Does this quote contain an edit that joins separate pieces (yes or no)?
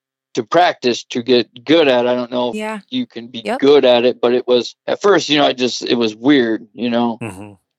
yes